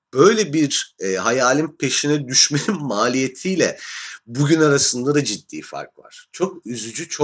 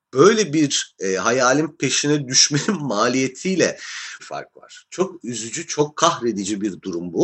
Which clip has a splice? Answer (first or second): second